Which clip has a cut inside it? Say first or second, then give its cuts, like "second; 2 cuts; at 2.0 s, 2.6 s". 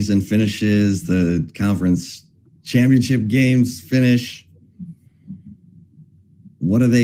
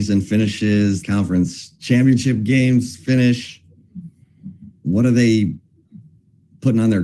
second; 3 cuts; at 1.0 s, 1.8 s, 4.8 s